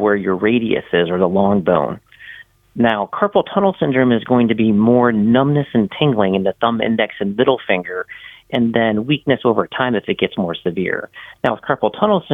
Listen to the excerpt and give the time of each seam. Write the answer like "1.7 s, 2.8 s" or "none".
none